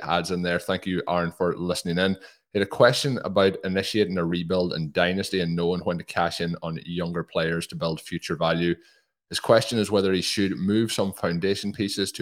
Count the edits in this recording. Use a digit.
0